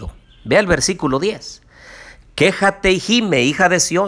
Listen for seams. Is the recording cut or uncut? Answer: uncut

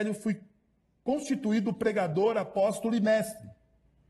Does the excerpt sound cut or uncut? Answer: uncut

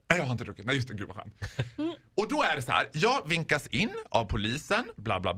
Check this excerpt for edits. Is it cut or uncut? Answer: uncut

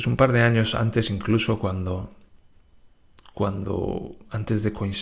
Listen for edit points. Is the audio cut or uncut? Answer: uncut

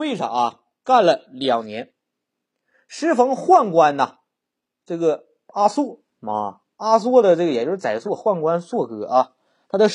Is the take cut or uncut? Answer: uncut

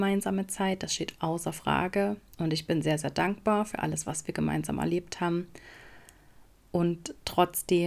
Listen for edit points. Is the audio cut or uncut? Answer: uncut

